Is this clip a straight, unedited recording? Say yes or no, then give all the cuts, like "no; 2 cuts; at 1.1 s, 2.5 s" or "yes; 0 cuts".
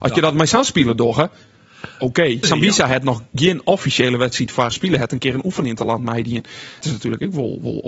no; 3 cuts; at 2.4 s, 4.7 s, 6.8 s